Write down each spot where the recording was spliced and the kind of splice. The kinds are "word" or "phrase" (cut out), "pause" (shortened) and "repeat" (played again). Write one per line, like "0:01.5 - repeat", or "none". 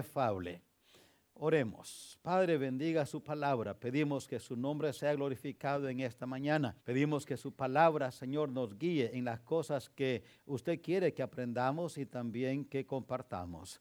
0:06.8 - pause